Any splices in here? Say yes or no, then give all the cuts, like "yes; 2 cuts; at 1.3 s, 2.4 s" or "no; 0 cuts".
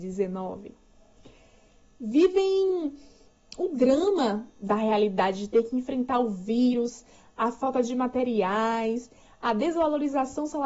no; 0 cuts